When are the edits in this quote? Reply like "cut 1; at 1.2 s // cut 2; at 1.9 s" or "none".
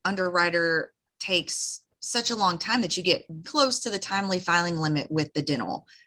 cut 1; at 1.1 s // cut 2; at 3.4 s